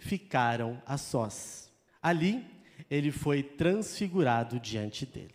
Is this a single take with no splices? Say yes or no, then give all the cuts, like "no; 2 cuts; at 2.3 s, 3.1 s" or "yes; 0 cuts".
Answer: no; 1 cut; at 1.9 s